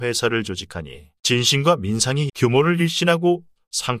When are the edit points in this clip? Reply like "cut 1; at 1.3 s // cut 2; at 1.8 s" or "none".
cut 1; at 1.2 s // cut 2; at 2.3 s